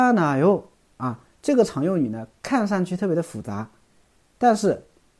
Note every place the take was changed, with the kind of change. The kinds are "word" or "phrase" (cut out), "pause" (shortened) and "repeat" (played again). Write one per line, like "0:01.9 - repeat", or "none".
none